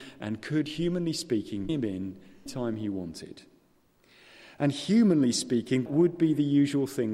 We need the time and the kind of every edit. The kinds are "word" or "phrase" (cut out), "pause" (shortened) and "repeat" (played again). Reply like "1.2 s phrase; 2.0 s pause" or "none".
1.7 s word; 2.5 s word; 5.9 s word